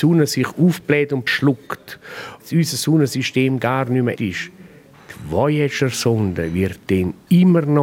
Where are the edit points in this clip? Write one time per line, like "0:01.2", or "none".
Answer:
0:01.3
0:02.4
0:04.2